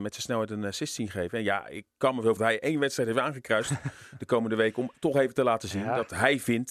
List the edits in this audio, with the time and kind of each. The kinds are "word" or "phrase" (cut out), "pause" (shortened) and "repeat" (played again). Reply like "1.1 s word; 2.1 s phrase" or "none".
2.4 s phrase